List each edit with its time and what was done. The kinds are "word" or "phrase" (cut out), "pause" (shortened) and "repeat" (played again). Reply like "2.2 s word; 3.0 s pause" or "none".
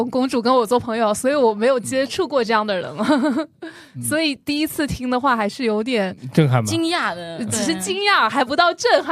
7.5 s word